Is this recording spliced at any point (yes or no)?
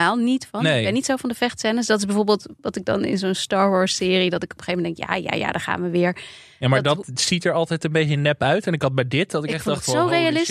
no